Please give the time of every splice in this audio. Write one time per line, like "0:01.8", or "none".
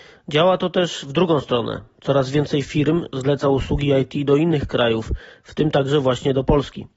none